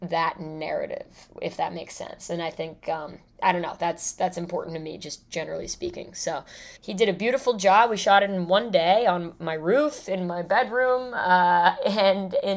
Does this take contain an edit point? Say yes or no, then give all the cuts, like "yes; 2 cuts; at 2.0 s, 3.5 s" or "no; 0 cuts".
yes; 1 cut; at 6.8 s